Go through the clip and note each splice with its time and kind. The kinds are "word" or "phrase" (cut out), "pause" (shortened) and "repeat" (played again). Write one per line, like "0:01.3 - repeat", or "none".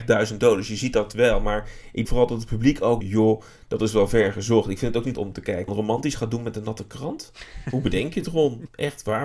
0:02.0 - word
0:03.0 - phrase
0:05.1 - word
0:05.7 - phrase